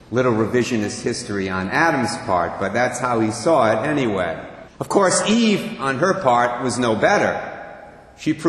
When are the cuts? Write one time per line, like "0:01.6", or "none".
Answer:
0:04.7